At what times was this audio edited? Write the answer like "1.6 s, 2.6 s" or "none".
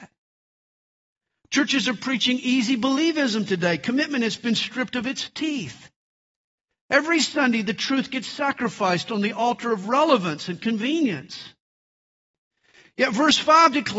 none